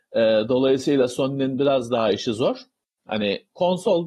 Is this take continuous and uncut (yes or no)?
yes